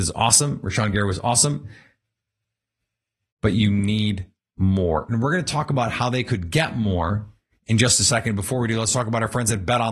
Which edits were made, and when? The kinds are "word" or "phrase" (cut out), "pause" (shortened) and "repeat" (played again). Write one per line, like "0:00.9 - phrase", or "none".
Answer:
none